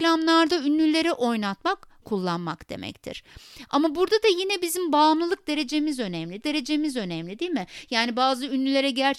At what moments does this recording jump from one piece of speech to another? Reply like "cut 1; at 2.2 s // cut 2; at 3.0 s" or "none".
cut 1; at 2.0 s // cut 2; at 6.4 s